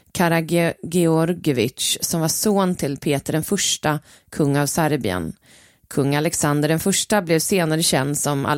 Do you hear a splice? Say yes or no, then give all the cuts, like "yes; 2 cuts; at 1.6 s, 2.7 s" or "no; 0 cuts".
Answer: no; 0 cuts